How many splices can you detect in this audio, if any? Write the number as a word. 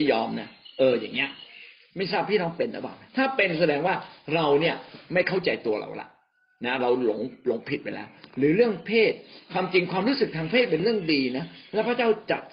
one